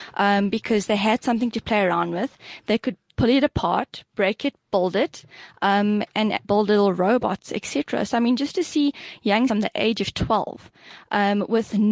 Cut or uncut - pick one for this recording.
cut